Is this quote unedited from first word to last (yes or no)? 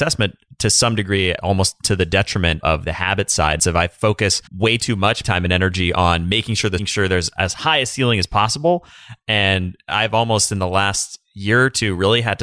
no